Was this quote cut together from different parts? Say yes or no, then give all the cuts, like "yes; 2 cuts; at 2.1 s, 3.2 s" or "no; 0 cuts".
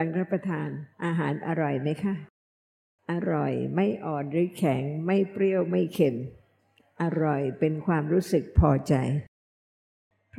yes; 1 cut; at 0.9 s